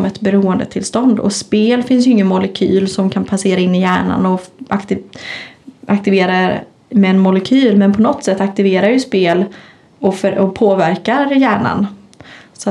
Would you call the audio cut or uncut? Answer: uncut